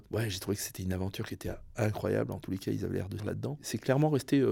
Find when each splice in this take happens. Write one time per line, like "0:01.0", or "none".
0:03.2